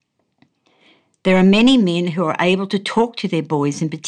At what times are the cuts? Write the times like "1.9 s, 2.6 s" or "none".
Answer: none